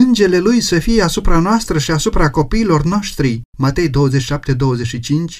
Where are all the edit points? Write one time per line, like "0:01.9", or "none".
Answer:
0:03.5